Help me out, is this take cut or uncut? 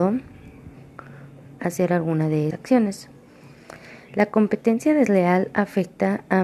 cut